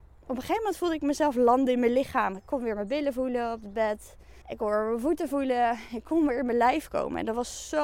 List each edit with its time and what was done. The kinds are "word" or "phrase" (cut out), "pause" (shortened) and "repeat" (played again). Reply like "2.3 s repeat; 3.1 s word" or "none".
4.4 s pause